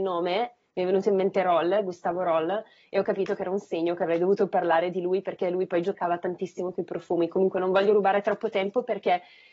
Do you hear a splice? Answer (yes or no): no